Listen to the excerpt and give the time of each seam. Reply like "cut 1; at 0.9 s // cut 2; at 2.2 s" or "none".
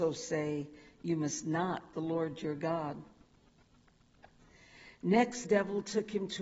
cut 1; at 1.9 s // cut 2; at 5.4 s